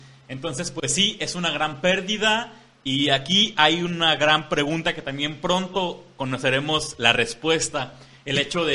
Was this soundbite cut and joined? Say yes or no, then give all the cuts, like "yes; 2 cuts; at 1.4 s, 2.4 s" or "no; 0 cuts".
no; 0 cuts